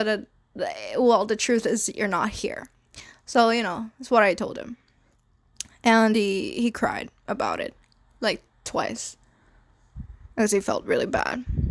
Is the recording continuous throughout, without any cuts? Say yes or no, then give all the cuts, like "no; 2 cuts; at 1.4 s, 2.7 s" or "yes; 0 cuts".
yes; 0 cuts